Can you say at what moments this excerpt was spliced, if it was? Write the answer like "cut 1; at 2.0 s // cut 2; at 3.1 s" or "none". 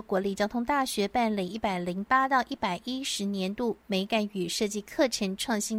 none